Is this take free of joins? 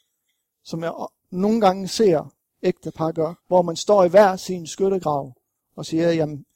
no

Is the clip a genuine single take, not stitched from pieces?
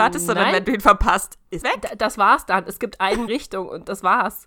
no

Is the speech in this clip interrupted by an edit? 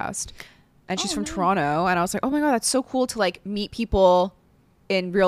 no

